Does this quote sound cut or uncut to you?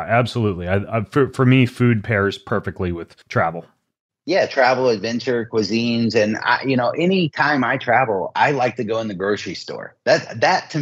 cut